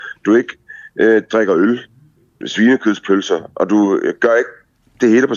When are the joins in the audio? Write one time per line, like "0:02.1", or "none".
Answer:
0:02.4

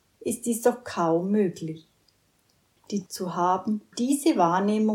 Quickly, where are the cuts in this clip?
0:03.1
0:03.9

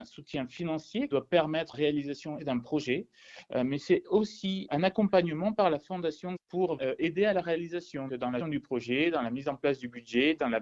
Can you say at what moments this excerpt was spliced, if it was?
0:01.1
0:01.7
0:02.4
0:04.7
0:06.4
0:06.8
0:08.1
0:08.4

